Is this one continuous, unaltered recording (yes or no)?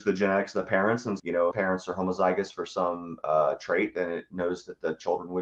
no